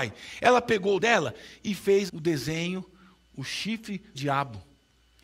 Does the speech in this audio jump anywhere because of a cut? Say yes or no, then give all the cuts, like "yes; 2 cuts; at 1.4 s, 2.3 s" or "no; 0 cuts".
yes; 3 cuts; at 1.0 s, 2.1 s, 4.1 s